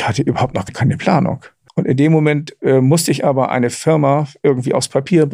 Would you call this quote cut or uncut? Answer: uncut